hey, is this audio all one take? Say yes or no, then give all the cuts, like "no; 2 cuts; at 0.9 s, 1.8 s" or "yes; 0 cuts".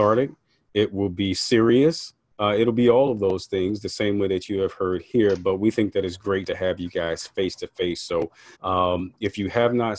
no; 1 cut; at 8.5 s